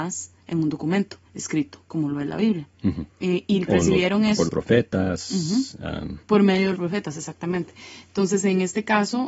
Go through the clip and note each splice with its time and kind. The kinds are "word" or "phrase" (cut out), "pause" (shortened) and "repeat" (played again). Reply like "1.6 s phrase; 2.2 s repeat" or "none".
1.3 s pause; 2.7 s pause; 3.1 s pause; 3.7 s word; 4.5 s word; 6.2 s pause; 6.8 s word